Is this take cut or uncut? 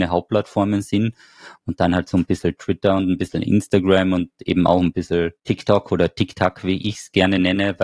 cut